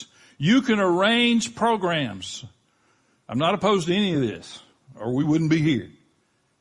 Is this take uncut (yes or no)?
yes